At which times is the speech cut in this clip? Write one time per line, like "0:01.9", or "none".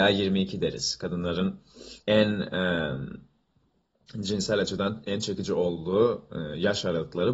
0:02.0